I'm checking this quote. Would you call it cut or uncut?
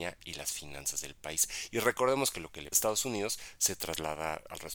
cut